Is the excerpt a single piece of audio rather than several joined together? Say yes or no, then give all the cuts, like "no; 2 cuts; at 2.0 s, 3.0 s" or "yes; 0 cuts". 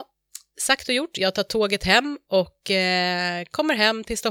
yes; 0 cuts